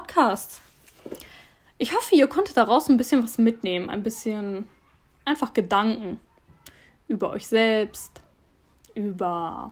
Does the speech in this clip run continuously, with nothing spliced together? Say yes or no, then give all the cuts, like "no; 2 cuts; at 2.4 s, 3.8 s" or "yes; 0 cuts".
yes; 0 cuts